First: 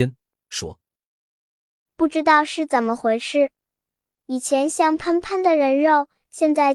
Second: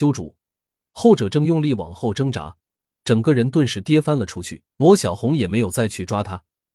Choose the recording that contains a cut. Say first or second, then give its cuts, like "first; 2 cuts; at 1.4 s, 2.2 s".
second; 1 cut; at 4.7 s